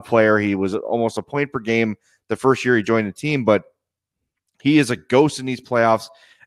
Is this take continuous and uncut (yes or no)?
yes